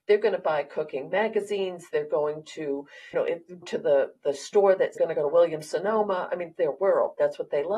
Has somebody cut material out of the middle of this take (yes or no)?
yes